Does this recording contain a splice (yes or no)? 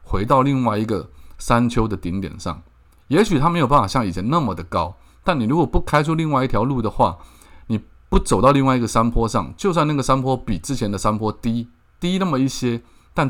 no